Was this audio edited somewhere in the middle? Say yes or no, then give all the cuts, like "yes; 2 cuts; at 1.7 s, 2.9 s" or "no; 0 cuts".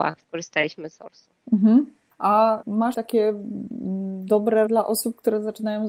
yes; 4 cuts; at 0.9 s, 2.1 s, 2.9 s, 4.7 s